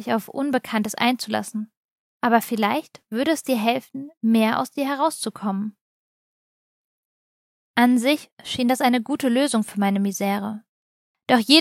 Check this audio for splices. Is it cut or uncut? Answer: uncut